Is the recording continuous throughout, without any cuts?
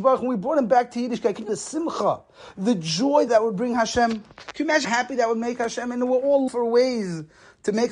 no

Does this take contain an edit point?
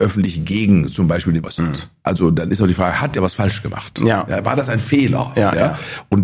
yes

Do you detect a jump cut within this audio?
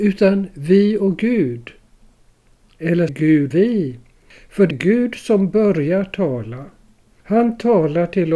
yes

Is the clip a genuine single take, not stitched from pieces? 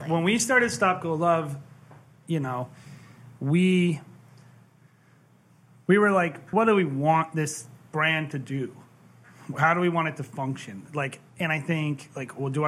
no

